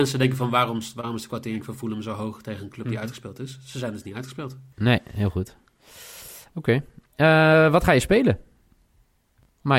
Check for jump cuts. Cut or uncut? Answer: cut